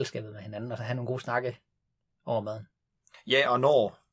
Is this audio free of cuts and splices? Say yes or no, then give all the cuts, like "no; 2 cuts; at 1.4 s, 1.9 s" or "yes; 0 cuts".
yes; 0 cuts